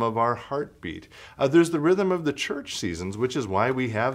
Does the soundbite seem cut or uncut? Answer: uncut